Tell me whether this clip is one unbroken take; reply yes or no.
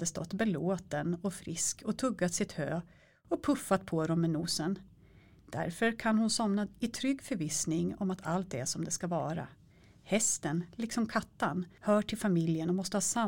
yes